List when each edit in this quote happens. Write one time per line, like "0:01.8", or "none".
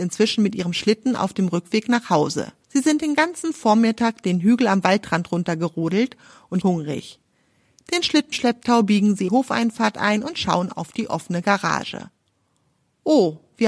0:02.6
0:06.6
0:08.3
0:09.3